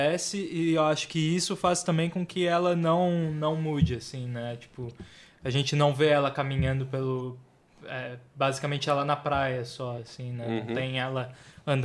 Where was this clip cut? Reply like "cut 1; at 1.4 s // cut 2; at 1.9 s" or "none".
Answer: none